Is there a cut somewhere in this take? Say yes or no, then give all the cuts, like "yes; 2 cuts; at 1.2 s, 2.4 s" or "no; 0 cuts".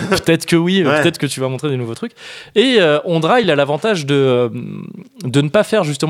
no; 0 cuts